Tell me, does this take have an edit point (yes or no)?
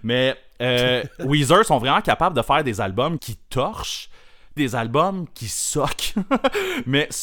yes